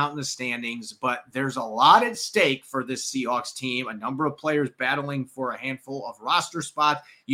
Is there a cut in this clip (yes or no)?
no